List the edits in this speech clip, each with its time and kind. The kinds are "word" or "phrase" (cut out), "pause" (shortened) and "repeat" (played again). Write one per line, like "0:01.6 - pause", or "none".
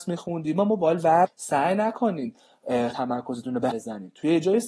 0:01.3 - word
0:02.9 - word
0:03.7 - word